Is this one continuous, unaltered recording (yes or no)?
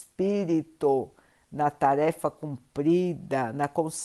yes